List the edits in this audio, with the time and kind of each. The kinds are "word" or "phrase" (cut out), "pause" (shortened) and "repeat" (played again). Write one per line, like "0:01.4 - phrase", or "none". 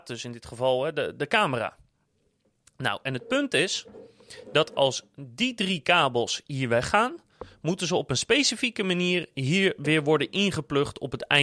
none